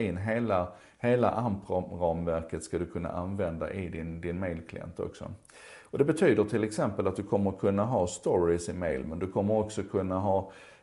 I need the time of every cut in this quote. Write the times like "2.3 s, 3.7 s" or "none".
none